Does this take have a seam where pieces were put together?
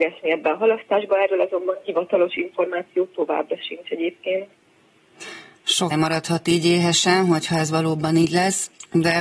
yes; 1 cut; at 5.9 s

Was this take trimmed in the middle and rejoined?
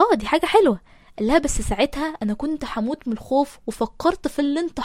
no; 0 cuts

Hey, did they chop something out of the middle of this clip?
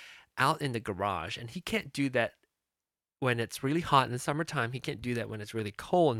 no; 0 cuts

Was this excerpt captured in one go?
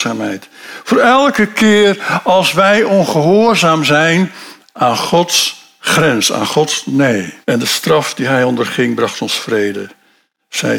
no; 1 cut; at 7.4 s

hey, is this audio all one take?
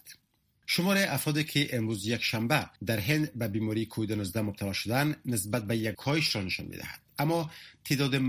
no; 2 cuts; at 2.8 s, 5.9 s

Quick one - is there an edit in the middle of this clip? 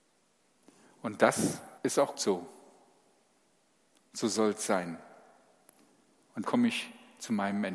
yes; 3 cuts; at 1.8 s, 2.1 s, 6.4 s

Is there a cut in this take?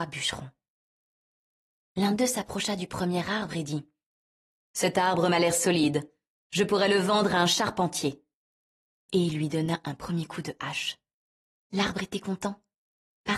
no; 0 cuts

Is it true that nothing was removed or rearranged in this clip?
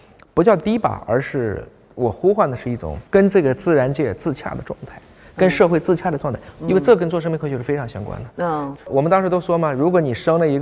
no; 3 cuts; at 3.1 s, 6.6 s, 8.8 s

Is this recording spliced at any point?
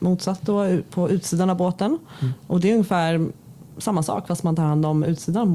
no; 0 cuts

